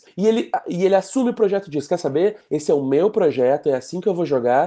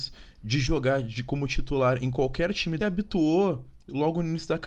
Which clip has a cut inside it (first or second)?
second